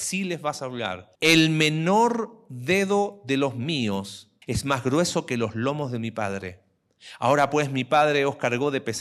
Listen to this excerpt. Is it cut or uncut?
cut